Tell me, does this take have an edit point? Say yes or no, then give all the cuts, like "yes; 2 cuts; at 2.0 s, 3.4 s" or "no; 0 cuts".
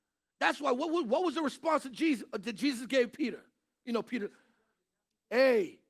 no; 0 cuts